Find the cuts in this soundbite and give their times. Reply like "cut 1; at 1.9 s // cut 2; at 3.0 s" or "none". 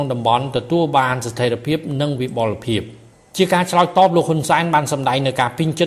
cut 1; at 3.1 s